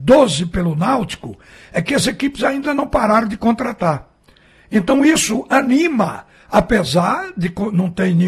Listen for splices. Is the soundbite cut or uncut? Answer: uncut